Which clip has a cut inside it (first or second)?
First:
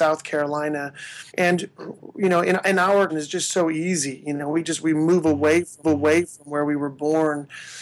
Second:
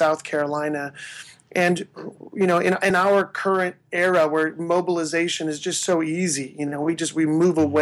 first